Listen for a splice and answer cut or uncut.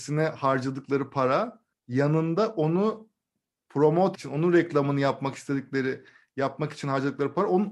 cut